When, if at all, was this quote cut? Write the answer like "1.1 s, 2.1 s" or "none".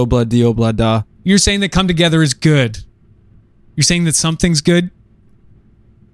none